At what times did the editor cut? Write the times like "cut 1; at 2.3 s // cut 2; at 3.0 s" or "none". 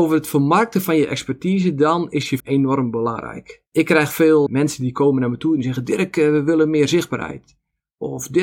cut 1; at 2.4 s // cut 2; at 3.7 s // cut 3; at 4.5 s

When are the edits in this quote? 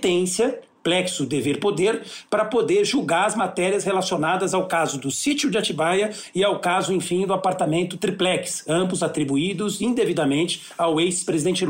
none

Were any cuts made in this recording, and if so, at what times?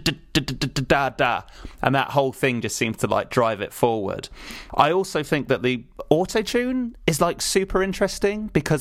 none

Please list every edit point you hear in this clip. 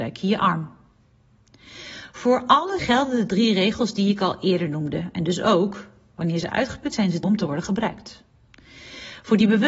cut 1; at 2.8 s // cut 2; at 6.9 s // cut 3; at 7.2 s

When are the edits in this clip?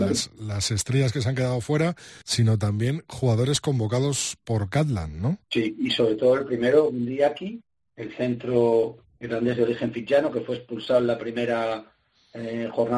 cut 1; at 2.2 s // cut 2; at 5.4 s // cut 3; at 7.7 s

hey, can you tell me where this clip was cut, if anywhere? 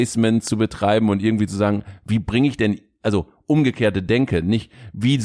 none

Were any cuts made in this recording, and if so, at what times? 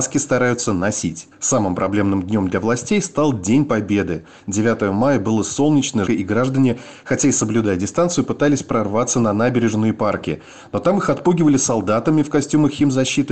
cut 1; at 1.3 s // cut 2; at 6.1 s

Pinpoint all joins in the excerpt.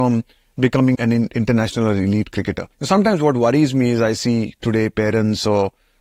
cut 1; at 0.9 s // cut 2; at 2.7 s

